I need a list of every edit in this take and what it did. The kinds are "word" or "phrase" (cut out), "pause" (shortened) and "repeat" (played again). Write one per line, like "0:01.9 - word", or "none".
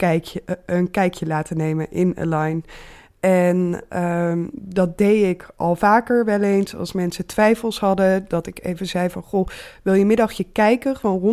none